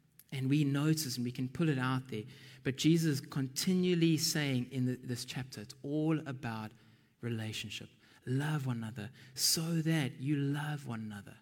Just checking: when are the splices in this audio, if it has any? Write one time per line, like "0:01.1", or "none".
none